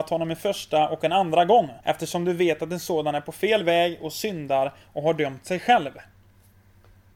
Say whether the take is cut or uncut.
cut